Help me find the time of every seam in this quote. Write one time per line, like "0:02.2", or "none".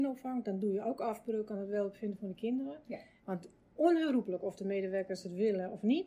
none